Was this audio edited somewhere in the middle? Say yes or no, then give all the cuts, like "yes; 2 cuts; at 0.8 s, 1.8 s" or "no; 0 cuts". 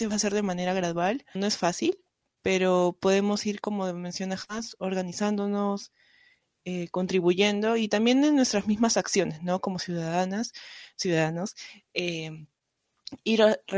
yes; 1 cut; at 1.3 s